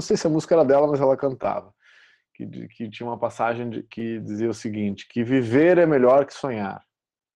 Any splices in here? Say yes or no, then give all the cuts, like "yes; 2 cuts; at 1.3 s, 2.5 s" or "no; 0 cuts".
no; 0 cuts